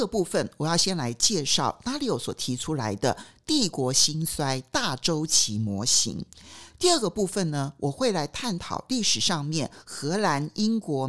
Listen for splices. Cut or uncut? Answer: uncut